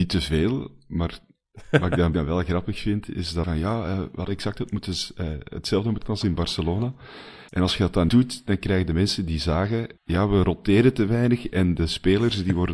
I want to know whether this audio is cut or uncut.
cut